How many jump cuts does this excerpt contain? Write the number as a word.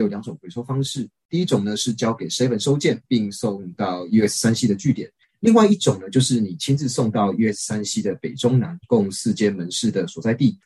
zero